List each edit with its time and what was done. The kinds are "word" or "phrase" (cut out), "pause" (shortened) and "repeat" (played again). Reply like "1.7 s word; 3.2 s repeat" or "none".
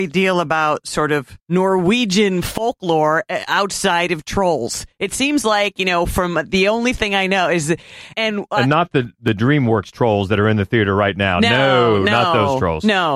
1.4 s pause; 8.1 s word